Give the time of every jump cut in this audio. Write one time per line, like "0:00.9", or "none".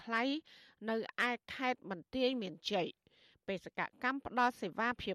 none

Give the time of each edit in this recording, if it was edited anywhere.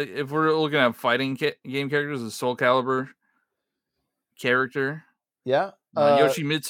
none

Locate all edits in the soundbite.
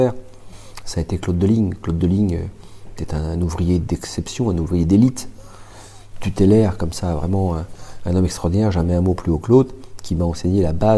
none

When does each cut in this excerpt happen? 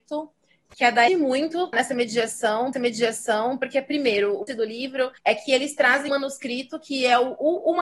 0:01.1
0:01.7
0:02.7
0:04.5
0:05.2
0:06.1

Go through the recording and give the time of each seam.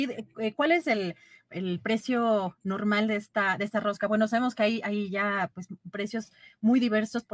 none

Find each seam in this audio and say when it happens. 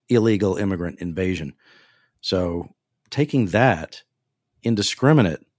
none

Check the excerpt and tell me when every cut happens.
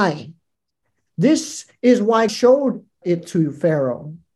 0:02.3
0:03.0

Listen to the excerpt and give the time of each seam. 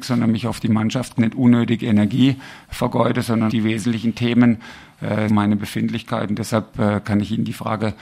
0:01.2
0:03.5
0:05.3

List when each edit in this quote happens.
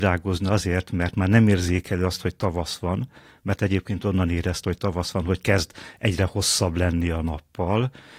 none

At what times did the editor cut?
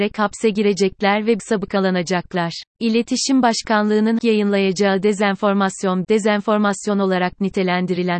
0:01.4
0:02.7
0:04.2
0:06.0

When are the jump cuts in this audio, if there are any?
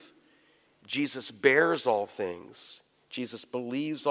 none

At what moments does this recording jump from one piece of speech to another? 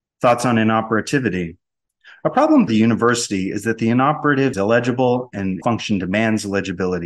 0:02.7
0:04.5
0:05.6

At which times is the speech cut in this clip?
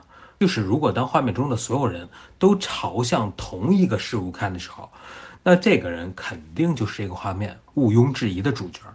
none

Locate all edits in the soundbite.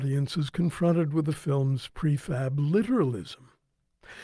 none

